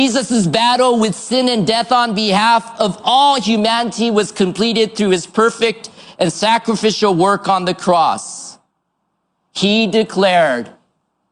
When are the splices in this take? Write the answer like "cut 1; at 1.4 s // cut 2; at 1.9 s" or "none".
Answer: none